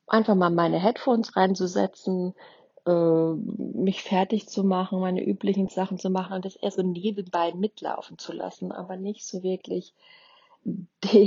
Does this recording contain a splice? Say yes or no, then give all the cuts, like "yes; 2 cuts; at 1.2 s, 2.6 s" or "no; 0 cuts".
no; 0 cuts